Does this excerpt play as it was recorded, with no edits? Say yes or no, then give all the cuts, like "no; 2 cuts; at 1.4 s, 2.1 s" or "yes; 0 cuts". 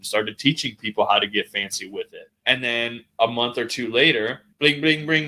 yes; 0 cuts